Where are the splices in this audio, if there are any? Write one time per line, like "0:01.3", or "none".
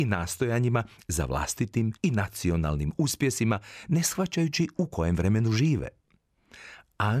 0:02.0